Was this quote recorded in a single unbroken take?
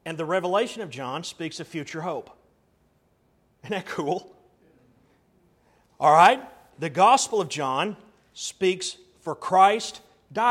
yes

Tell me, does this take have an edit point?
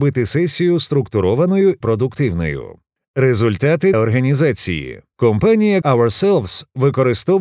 yes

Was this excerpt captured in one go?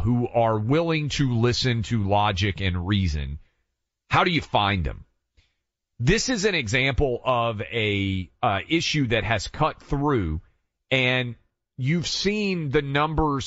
yes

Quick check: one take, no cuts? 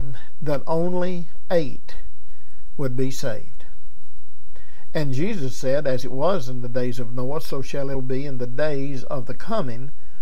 no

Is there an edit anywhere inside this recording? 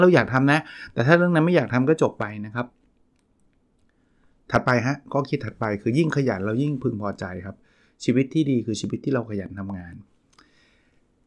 no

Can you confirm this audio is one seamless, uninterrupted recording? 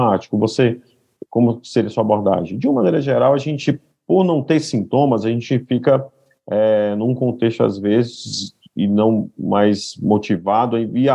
yes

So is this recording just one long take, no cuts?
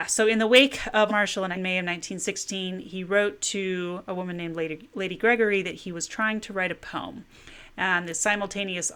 no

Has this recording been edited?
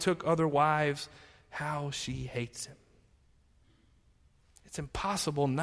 no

